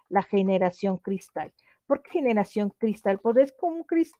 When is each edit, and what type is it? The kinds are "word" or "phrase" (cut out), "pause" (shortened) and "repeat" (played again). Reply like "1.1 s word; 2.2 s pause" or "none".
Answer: 2.1 s word